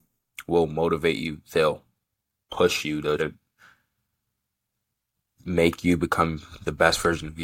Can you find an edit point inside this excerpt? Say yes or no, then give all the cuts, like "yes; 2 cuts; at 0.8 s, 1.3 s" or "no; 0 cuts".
yes; 1 cut; at 3.2 s